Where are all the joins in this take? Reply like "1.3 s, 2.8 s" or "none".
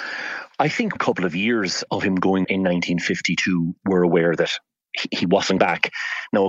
1.0 s, 1.9 s, 2.4 s, 3.8 s, 5.6 s